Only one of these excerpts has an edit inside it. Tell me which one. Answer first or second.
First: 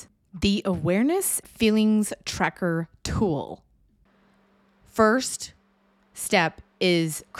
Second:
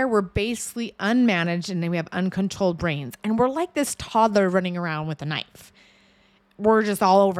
first